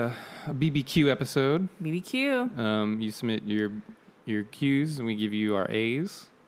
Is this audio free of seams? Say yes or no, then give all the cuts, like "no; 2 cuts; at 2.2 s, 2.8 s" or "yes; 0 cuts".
yes; 0 cuts